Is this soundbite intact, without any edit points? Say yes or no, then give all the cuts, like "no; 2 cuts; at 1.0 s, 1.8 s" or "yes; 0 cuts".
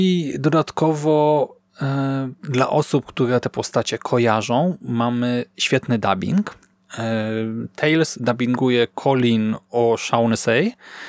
no; 1 cut; at 2.4 s